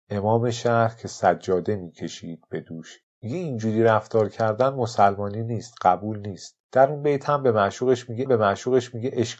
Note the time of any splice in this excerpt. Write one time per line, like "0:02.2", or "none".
0:03.1
0:06.6
0:08.3

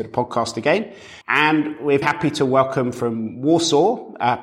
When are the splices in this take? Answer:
0:01.2
0:02.0

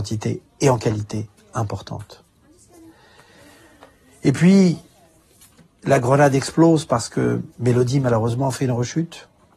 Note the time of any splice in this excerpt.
0:07.5

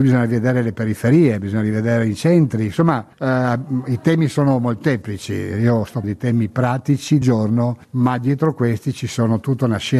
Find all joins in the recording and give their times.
0:03.1
0:06.0
0:07.2
0:07.8

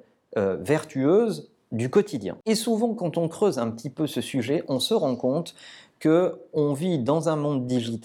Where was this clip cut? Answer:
none

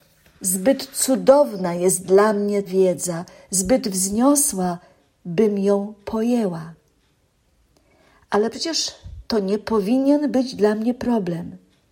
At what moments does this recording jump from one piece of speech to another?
0:02.6
0:09.2

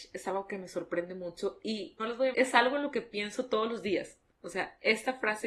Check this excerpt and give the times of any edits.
0:02.0
0:02.3

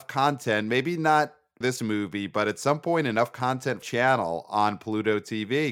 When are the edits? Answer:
0:01.6
0:03.8

